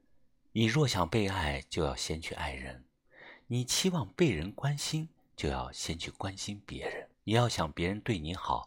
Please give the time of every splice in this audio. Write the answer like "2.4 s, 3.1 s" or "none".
7.1 s

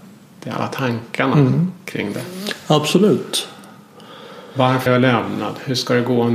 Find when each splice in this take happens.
4.9 s

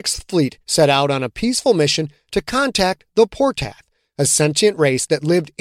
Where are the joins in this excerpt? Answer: none

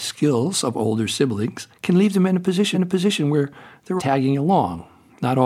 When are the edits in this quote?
1.7 s, 2.7 s, 4.0 s

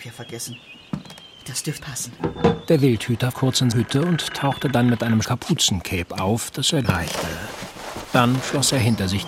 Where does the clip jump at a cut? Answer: 1.8 s, 3.3 s, 3.7 s, 5.2 s, 6.8 s

